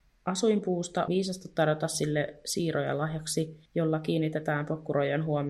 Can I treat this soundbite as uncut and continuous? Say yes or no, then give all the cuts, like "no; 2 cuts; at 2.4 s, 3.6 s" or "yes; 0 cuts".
no; 2 cuts; at 1.1 s, 3.7 s